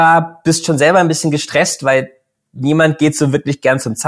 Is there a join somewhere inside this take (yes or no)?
no